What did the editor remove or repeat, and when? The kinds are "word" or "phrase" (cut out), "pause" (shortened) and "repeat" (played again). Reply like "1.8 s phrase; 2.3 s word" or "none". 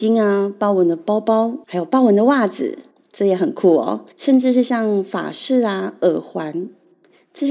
1.6 s pause; 2.9 s pause; 4.1 s pause

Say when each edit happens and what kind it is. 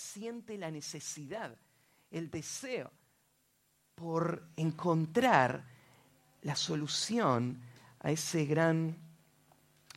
none

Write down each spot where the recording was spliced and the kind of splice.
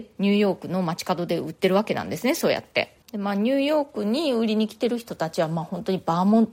3.0 s pause

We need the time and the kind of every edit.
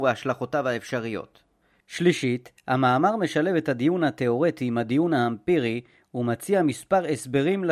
none

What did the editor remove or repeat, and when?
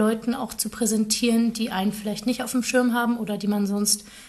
none

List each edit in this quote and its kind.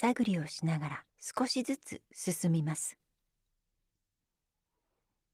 1.1 s pause; 2.0 s pause

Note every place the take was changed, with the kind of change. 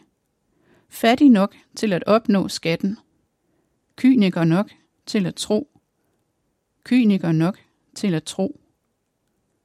none

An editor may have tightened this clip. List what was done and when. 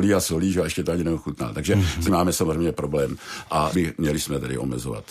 2.1 s word; 3.7 s word

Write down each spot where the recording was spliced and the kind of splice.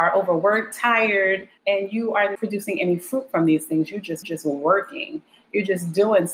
1.6 s pause; 2.4 s word; 4.2 s repeat

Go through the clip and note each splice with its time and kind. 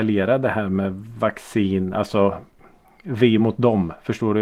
none

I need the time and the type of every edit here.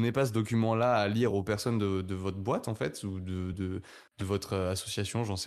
none

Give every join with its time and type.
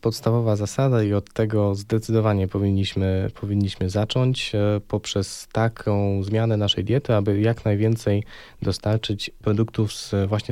none

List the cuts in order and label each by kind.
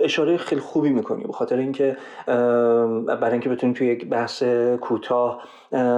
none

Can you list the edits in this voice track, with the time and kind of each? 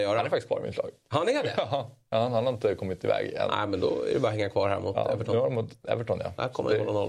none

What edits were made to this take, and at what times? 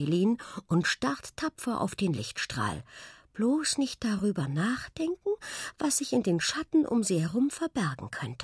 none

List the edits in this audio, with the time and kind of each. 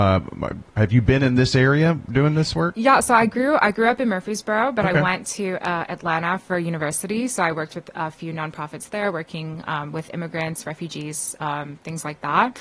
none

